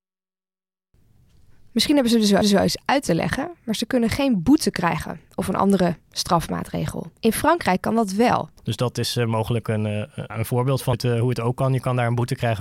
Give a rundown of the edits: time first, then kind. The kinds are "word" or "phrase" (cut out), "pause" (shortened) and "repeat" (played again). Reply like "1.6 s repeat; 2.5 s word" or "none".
2.4 s repeat; 7.2 s pause; 8.6 s pause; 10.3 s word; 10.9 s word

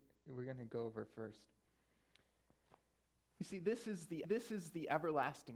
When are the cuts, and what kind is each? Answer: 3.1 s pause; 4.2 s repeat

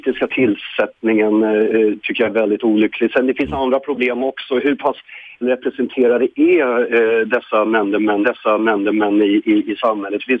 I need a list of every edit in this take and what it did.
5.4 s word; 8.2 s repeat

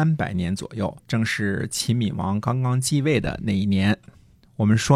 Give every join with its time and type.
1.0 s pause

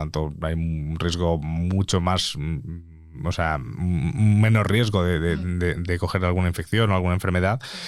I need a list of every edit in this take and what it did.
none

